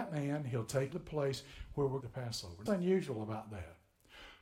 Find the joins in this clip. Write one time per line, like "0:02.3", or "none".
0:00.9
0:02.0
0:02.7